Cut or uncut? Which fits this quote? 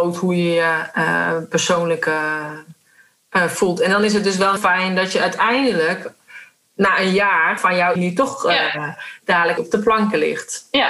cut